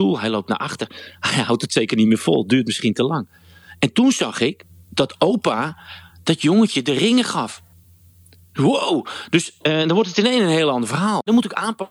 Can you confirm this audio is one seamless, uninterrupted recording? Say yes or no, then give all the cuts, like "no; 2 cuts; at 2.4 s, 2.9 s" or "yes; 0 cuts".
yes; 0 cuts